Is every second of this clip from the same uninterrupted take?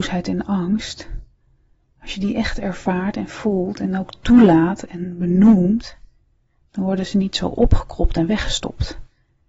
yes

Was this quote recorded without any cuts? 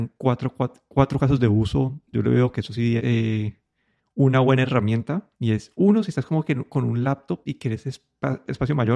no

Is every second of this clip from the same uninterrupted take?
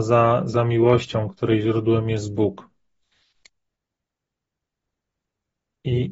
yes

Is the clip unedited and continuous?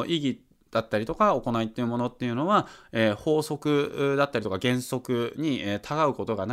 yes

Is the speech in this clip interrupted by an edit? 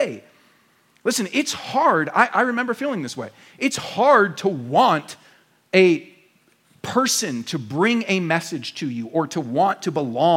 no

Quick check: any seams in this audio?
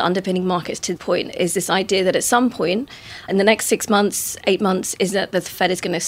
yes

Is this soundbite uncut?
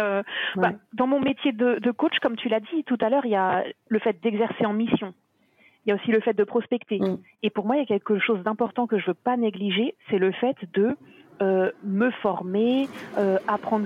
yes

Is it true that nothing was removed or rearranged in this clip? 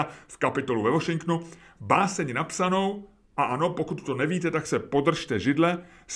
yes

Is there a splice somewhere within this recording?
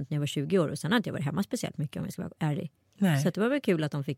no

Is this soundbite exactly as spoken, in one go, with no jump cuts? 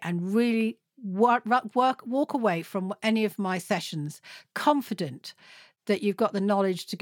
yes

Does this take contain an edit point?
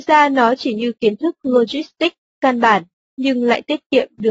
no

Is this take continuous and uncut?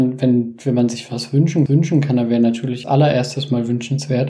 no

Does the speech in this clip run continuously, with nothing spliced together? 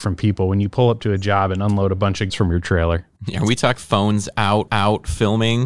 no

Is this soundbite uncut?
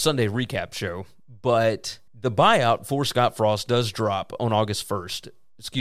no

